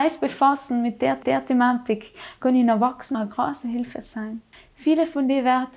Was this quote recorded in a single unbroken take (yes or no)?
no